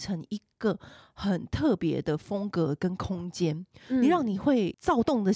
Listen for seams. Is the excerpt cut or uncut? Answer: uncut